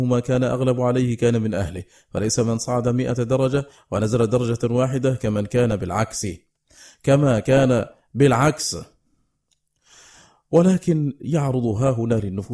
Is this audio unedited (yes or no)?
yes